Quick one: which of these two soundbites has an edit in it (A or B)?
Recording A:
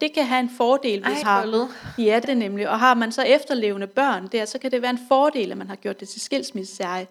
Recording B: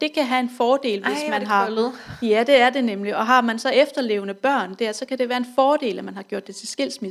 A